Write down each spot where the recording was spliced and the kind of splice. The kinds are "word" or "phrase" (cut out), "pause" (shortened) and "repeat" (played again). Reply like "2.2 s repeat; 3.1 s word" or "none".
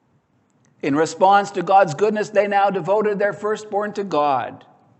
none

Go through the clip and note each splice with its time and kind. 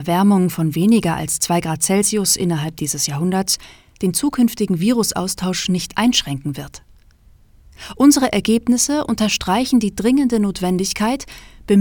none

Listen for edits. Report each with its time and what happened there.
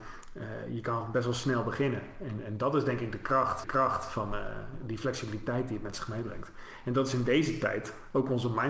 3.6 s repeat

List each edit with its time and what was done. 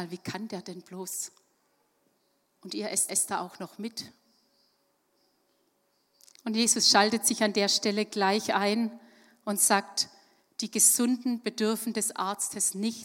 3.1 s repeat

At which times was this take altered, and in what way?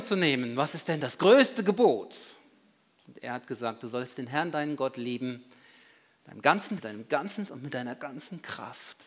6.8 s word; 7.5 s word

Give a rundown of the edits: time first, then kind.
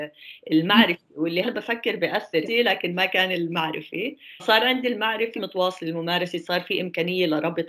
1.4 s word; 2.5 s phrase; 4.4 s word; 5.4 s word

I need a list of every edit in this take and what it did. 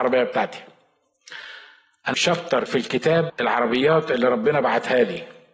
2.1 s word; 2.7 s word; 3.3 s word

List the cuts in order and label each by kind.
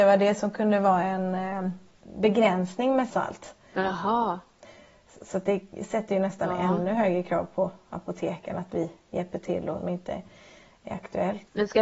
3.1 s phrase; 9.8 s phrase

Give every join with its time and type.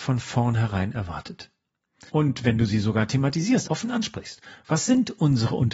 2.1 s pause; 3.6 s word

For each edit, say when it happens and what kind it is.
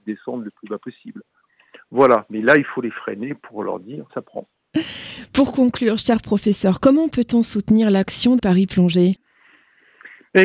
4.1 s word; 8.4 s word

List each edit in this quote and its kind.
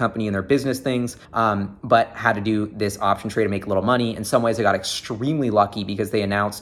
1.2 s pause

